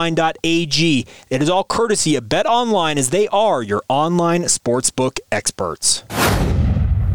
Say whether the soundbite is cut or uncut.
uncut